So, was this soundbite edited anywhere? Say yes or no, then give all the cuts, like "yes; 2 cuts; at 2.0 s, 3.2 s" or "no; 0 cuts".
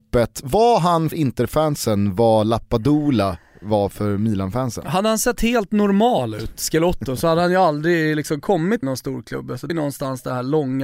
yes; 3 cuts; at 1.1 s, 8.8 s, 9.7 s